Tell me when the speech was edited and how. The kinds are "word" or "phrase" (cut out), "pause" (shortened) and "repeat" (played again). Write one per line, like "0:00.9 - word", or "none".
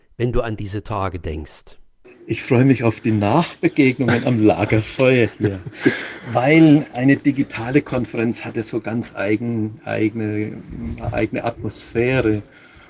0:02.0 - pause